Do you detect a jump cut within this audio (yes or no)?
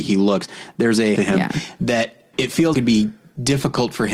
yes